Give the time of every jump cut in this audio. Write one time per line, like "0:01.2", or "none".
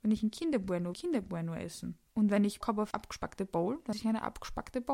0:00.9
0:02.1
0:02.6
0:02.9
0:03.9